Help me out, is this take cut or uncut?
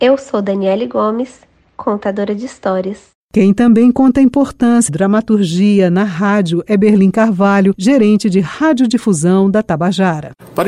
cut